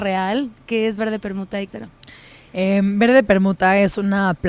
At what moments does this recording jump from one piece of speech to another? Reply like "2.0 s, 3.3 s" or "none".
1.7 s